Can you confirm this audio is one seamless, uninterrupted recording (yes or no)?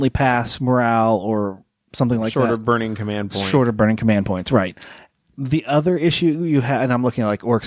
yes